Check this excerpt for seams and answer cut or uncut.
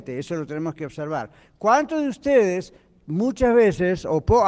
uncut